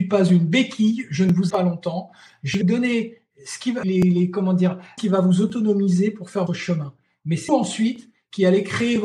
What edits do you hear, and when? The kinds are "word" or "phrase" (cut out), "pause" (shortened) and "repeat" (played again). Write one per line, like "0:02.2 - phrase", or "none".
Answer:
0:01.5 - word
0:02.6 - word
0:03.8 - word
0:05.0 - word
0:06.5 - word
0:07.5 - word